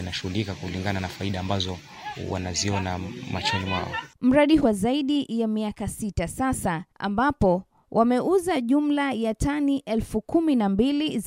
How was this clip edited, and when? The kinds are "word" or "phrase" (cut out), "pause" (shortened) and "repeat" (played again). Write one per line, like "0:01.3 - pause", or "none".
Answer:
0:04.6 - phrase
0:06.9 - pause